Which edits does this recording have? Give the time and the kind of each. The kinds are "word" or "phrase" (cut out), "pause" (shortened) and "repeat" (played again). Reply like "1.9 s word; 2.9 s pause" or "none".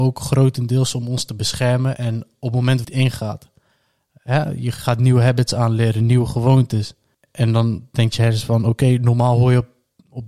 2.8 s phrase

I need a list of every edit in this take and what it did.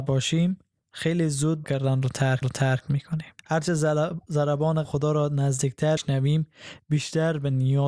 1.6 s word; 2.4 s repeat; 3.4 s pause; 4.8 s word; 6.0 s word

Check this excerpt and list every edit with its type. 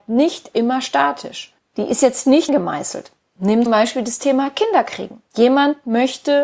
2.5 s phrase; 3.7 s word; 5.3 s pause

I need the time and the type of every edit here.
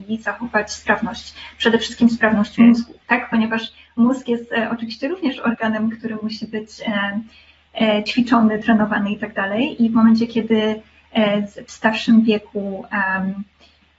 none

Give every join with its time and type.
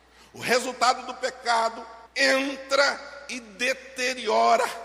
2.1 s pause

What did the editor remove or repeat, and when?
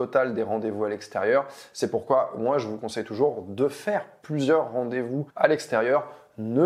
5.3 s pause

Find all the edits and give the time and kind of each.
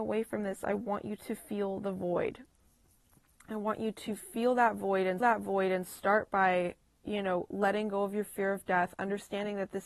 5.2 s repeat

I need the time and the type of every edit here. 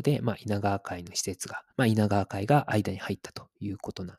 1.7 s pause

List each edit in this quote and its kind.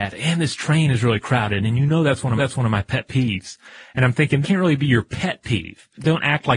2.4 s repeat; 4.4 s phrase

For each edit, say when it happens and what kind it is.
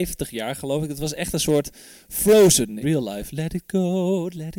2.8 s word

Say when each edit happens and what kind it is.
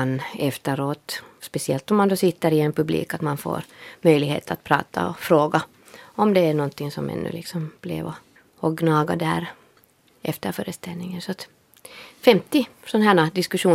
8.4 s pause

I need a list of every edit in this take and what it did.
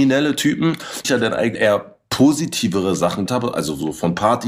1.0 s phrase; 1.5 s word; 3.3 s word

